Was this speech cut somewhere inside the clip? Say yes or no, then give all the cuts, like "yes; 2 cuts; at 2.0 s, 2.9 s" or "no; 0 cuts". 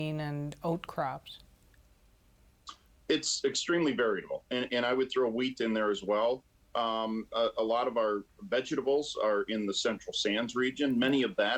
no; 0 cuts